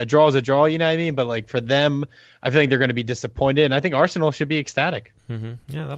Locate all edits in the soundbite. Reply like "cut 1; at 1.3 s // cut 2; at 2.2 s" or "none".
none